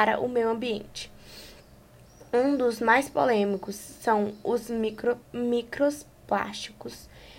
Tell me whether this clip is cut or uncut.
cut